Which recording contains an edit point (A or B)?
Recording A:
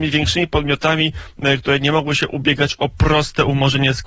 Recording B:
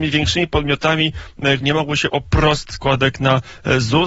B